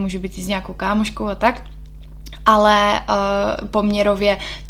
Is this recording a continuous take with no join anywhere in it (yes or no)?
yes